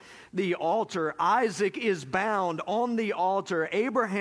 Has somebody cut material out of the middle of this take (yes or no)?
no